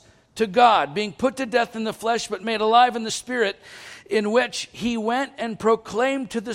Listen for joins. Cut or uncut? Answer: uncut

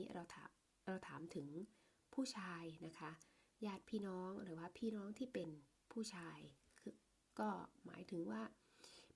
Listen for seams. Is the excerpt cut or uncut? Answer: uncut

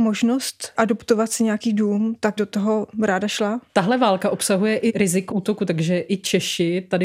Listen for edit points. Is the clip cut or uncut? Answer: cut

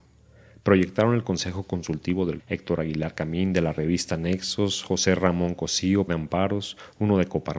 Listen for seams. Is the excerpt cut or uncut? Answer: cut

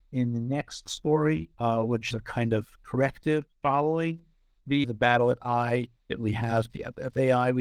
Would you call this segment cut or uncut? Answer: cut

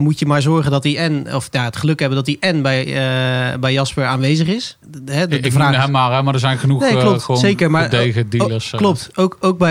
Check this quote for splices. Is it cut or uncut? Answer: cut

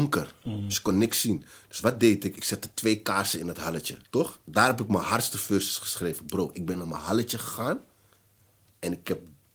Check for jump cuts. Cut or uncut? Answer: cut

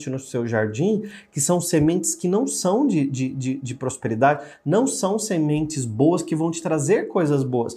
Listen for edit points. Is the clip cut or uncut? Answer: uncut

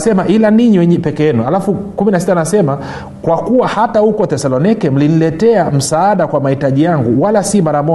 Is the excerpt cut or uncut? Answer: uncut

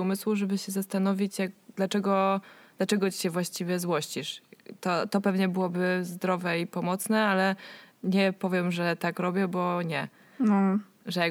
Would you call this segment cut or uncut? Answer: uncut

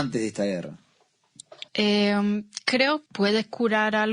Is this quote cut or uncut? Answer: cut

